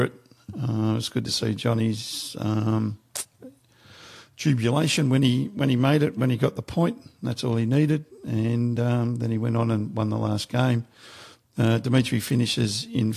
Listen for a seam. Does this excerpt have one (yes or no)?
no